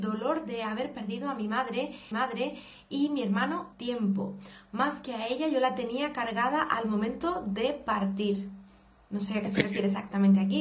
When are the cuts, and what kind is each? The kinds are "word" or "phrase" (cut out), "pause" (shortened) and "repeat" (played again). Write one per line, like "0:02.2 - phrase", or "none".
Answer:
0:02.1 - repeat
0:03.7 - word